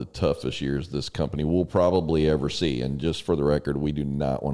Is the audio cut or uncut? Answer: uncut